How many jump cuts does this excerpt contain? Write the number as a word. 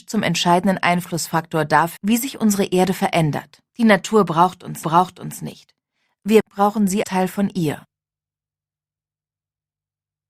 five